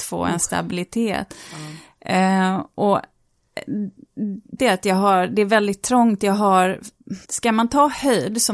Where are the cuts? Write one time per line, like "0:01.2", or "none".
0:04.6
0:07.2